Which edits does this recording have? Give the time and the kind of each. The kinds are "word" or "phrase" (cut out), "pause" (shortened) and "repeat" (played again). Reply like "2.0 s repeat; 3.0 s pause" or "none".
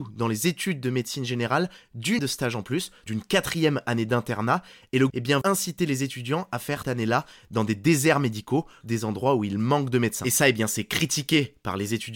2.2 s word; 3.1 s word; 5.1 s word; 5.4 s word; 6.8 s word; 8.8 s word